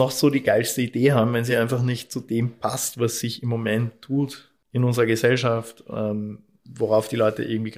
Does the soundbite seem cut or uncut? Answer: uncut